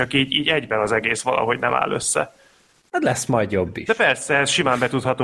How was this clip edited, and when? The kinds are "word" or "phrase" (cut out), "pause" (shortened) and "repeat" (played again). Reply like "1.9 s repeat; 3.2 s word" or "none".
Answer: none